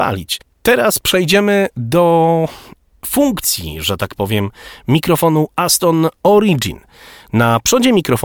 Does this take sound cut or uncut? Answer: cut